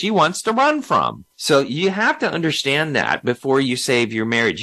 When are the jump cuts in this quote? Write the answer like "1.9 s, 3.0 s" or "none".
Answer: 1.3 s